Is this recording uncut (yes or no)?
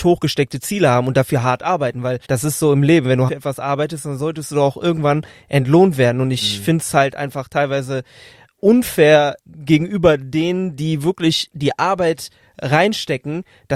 no